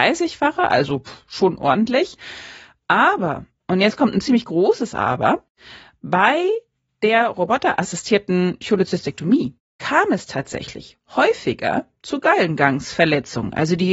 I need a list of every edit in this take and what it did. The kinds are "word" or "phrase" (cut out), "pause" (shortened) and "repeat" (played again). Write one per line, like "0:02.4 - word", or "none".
none